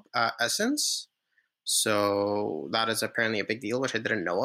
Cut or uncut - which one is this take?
uncut